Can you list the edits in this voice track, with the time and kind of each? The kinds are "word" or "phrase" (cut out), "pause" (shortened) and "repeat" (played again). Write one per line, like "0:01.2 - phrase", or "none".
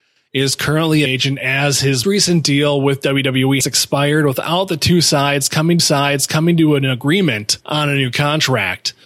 0:01.1 - phrase
0:02.0 - word
0:03.6 - word
0:05.8 - repeat